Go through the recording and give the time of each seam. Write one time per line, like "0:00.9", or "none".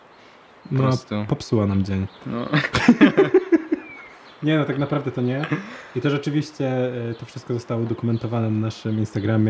none